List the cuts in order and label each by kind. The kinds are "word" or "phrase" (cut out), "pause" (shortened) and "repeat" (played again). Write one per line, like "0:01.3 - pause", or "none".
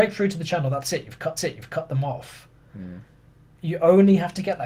0:01.4 - repeat